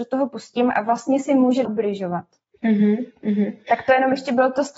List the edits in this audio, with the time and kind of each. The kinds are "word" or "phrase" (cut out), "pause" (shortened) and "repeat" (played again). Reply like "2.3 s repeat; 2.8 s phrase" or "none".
1.6 s word